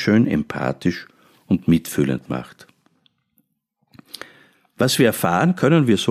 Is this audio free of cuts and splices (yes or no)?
yes